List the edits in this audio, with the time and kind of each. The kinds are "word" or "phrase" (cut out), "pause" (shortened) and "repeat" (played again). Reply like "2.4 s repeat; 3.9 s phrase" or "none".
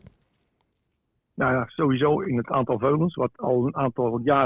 3.3 s pause